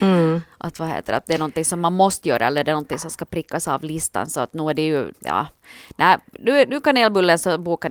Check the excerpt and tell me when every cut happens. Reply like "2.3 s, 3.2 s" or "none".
5.1 s